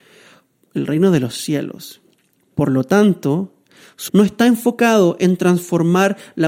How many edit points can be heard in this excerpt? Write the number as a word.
one